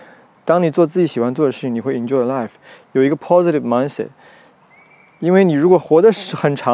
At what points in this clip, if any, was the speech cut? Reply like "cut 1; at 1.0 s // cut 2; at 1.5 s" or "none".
none

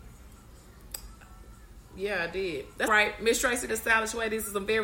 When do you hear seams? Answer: cut 1; at 2.9 s // cut 2; at 3.7 s

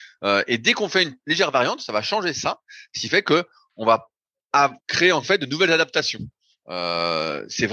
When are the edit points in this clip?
cut 1; at 4.8 s

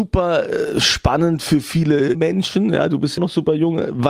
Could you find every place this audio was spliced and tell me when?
cut 1; at 2.1 s // cut 2; at 3.2 s

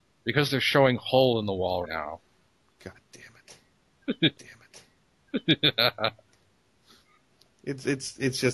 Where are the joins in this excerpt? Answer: cut 1; at 1.8 s // cut 2; at 4.3 s

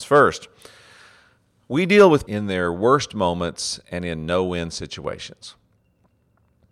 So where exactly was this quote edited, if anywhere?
cut 1; at 2.3 s

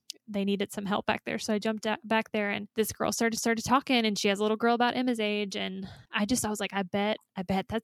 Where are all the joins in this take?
cut 1; at 2.7 s // cut 2; at 3.4 s // cut 3; at 6.1 s

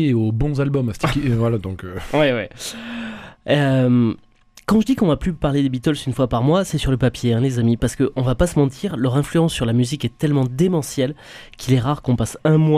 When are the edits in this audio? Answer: none

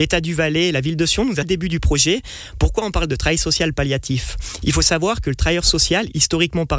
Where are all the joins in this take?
cut 1; at 1.4 s

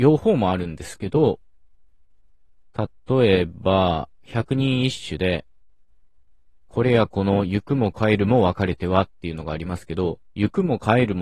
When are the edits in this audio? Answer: none

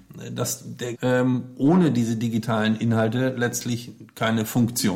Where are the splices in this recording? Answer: cut 1; at 0.9 s

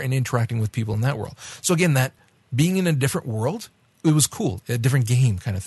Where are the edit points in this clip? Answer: none

